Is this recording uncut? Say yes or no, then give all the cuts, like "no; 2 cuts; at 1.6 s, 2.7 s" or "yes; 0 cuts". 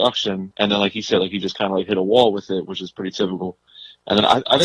yes; 0 cuts